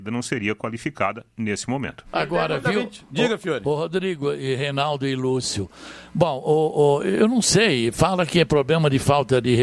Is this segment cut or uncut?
uncut